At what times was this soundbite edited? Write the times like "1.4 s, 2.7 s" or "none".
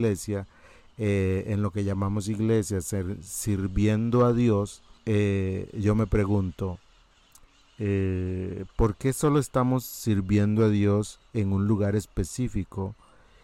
5.0 s